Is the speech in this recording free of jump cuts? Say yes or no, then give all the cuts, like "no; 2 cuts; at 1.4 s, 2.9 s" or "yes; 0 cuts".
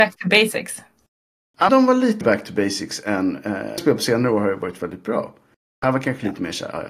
no; 4 cuts; at 1.7 s, 2.2 s, 3.8 s, 4.8 s